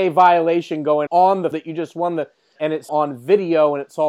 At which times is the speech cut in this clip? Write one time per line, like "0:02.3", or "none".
0:01.1
0:01.5
0:02.6
0:02.9